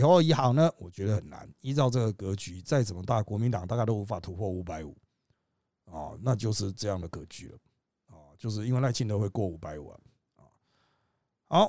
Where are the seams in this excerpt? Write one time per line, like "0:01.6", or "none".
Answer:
none

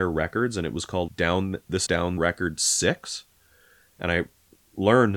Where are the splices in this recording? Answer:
0:01.1
0:01.9
0:02.2

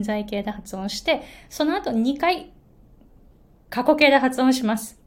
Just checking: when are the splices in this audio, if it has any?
none

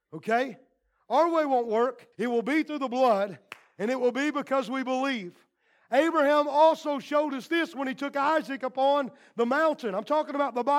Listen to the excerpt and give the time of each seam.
0:02.1

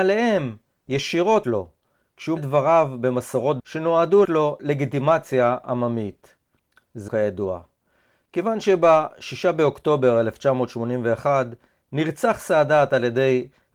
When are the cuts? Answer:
0:01.4
0:02.4
0:03.6
0:04.2
0:07.1

